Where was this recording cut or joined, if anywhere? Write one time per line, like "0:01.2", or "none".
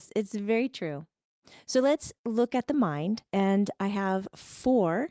0:02.2
0:03.3